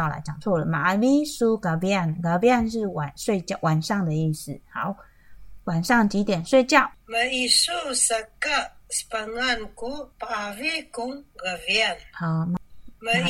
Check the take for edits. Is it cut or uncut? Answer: cut